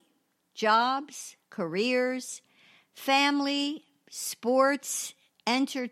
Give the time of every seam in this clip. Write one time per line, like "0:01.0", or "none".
0:01.4